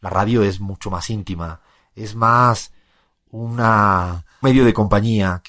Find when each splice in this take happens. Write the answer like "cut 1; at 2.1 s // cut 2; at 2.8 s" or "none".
cut 1; at 4.4 s